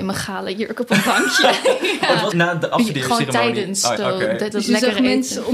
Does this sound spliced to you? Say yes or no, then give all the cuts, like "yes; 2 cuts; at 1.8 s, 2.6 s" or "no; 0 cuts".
yes; 3 cuts; at 2.3 s, 4.0 s, 4.5 s